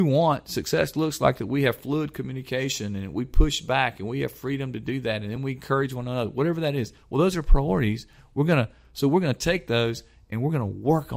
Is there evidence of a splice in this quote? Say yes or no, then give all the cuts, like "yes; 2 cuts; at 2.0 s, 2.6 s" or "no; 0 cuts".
no; 0 cuts